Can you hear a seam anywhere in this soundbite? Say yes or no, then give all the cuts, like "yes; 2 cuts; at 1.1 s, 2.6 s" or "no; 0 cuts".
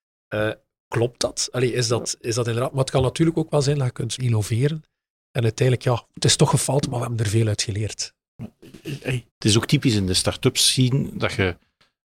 yes; 2 cuts; at 4.2 s, 9.3 s